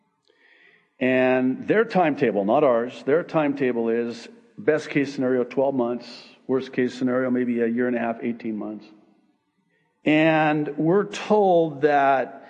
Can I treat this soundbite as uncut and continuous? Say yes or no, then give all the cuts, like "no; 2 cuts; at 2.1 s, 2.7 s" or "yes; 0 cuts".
yes; 0 cuts